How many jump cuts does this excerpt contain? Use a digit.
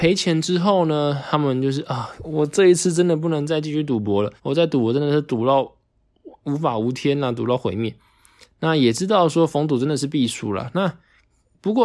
1